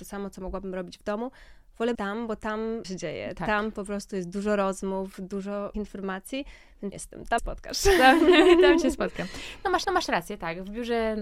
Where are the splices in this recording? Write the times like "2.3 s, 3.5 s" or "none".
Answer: 1.9 s, 2.8 s, 5.7 s, 6.9 s, 7.4 s, 9.8 s